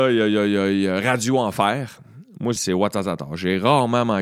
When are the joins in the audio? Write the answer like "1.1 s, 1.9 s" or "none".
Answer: 2.6 s